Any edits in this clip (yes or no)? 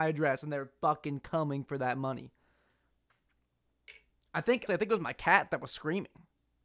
yes